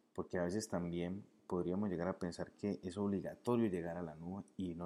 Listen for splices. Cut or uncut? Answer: uncut